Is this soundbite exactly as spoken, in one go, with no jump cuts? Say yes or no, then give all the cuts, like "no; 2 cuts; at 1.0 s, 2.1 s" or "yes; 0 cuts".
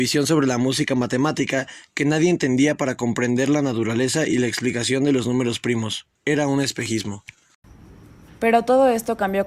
no; 1 cut; at 6.2 s